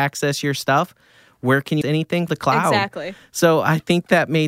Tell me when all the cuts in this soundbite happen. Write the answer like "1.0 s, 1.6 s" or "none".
1.8 s, 2.3 s